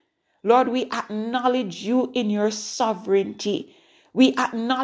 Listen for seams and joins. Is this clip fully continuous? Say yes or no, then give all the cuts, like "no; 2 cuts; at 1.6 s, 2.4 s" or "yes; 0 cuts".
yes; 0 cuts